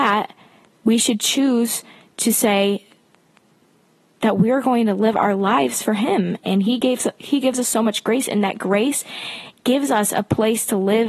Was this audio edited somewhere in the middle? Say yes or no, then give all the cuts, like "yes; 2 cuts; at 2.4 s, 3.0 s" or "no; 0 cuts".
no; 0 cuts